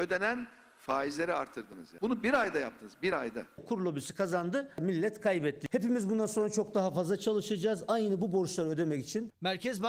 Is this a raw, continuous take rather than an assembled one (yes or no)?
yes